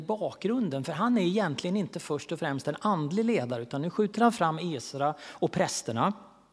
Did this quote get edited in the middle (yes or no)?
no